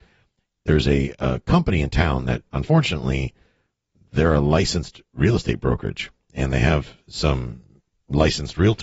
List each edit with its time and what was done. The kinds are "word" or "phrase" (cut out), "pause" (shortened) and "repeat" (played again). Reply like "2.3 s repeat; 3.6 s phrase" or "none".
none